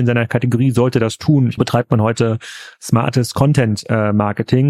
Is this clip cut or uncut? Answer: cut